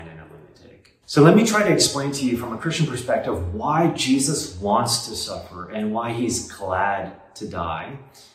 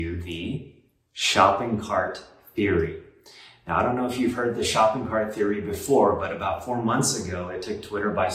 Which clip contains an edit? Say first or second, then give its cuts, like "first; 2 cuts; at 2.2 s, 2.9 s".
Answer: first; 1 cut; at 1.0 s